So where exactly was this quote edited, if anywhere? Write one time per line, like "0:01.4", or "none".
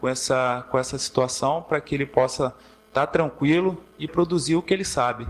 0:04.1